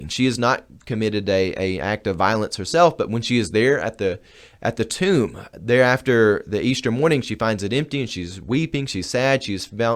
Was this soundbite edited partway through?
no; 0 cuts

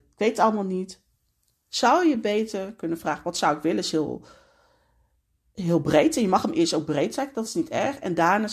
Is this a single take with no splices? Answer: yes; 0 cuts

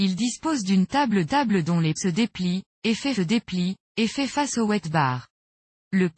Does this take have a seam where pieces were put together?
yes; 3 cuts; at 1.3 s, 2.0 s, 3.2 s

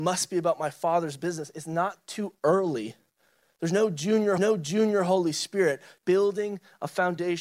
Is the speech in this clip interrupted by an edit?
yes; 2 cuts; at 4.4 s, 6.0 s

